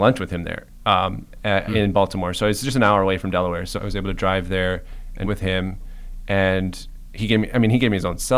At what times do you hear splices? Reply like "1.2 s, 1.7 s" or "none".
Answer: 3.7 s, 5.2 s